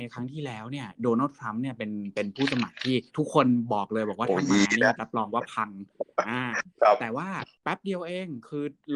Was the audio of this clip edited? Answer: yes; 1 cut; at 3.1 s

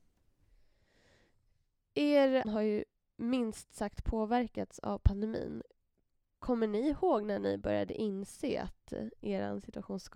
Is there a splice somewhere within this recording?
yes; 1 cut; at 2.4 s

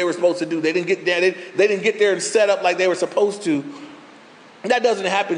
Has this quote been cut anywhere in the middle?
no; 0 cuts

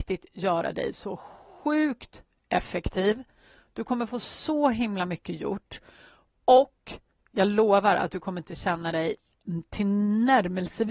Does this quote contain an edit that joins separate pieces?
no; 0 cuts

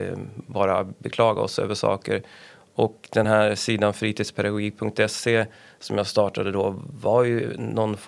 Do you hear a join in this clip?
no; 0 cuts

